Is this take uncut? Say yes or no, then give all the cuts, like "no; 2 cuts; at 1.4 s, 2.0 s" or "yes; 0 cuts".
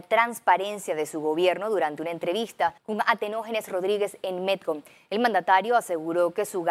no; 1 cut; at 2.8 s